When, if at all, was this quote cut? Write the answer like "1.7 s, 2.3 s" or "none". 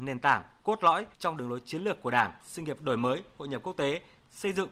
1.1 s, 2.4 s

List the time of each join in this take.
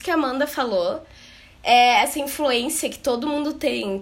none

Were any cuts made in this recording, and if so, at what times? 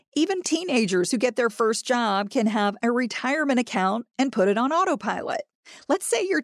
none

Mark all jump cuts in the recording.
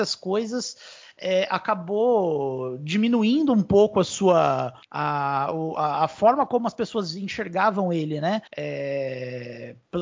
4.8 s, 8.5 s

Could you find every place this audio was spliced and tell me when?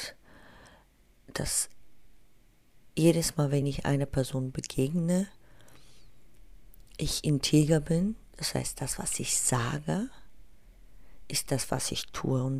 none

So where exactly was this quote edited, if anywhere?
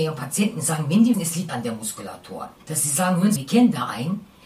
1.1 s, 1.5 s, 2.6 s, 3.4 s

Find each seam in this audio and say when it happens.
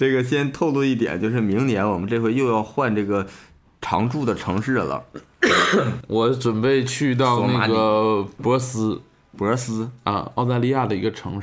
6.0 s

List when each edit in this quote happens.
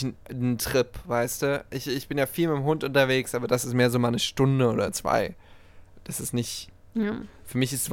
none

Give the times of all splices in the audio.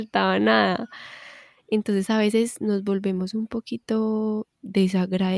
none

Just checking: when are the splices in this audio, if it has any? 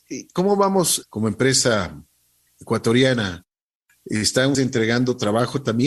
1.0 s, 4.5 s

